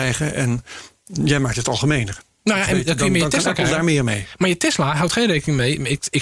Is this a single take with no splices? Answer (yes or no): yes